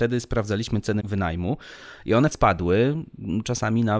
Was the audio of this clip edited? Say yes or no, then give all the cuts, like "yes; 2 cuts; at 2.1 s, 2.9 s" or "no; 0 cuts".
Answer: yes; 2 cuts; at 1.0 s, 2.3 s